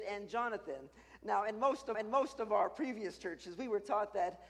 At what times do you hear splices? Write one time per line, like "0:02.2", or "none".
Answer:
0:01.9